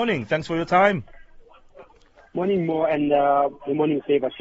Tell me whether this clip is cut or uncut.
uncut